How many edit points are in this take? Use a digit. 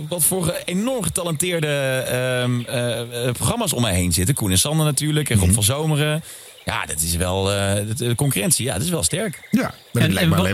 0